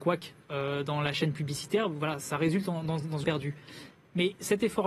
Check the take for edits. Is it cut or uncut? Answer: cut